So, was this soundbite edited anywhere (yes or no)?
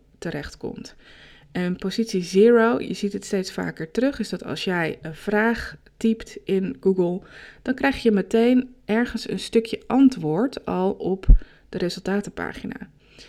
no